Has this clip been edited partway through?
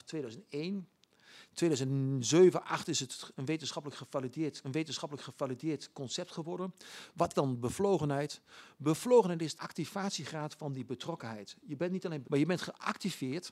yes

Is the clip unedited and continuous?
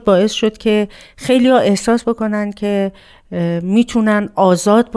yes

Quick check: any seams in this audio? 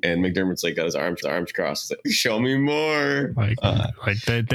yes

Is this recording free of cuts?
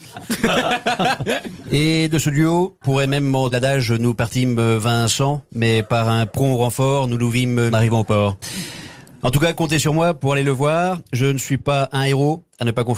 no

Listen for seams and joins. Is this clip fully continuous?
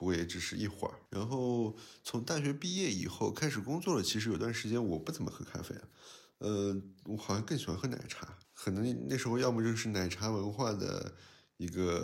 no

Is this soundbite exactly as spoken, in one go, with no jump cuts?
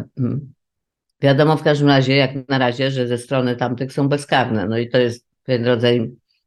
no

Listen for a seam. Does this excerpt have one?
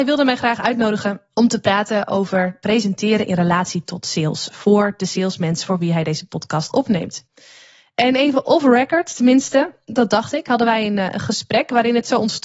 no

